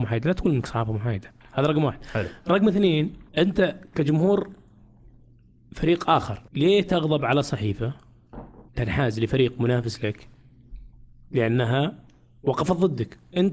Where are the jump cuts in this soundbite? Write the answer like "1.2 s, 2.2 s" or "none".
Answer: 3.3 s, 6.5 s, 8.7 s

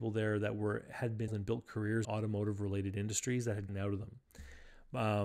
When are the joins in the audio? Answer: 1.3 s, 2.0 s, 3.7 s

